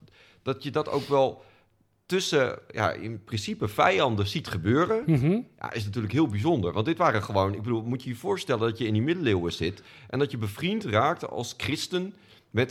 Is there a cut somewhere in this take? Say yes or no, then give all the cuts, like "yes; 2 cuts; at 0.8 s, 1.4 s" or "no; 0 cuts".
no; 0 cuts